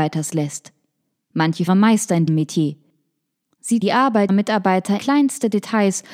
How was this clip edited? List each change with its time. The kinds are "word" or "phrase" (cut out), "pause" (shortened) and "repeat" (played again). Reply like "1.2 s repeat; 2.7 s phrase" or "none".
1.7 s phrase; 2.3 s word; 3.8 s word; 4.3 s word; 5.0 s word